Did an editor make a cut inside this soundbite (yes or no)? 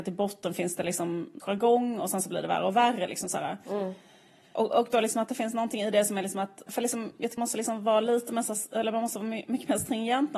yes